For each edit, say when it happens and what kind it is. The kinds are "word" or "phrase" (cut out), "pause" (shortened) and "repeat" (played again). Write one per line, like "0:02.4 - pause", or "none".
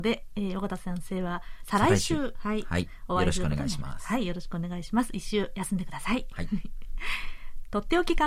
none